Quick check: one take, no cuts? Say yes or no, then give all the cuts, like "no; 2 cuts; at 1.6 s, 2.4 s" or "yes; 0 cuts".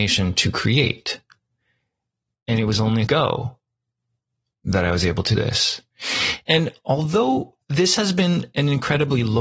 no; 3 cuts; at 3.1 s, 5.3 s, 7.6 s